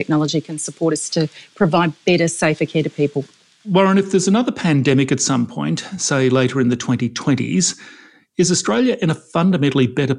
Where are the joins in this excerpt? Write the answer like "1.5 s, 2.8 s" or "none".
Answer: none